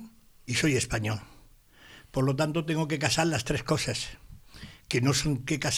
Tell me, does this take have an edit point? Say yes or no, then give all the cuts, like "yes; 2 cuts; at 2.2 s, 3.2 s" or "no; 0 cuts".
no; 0 cuts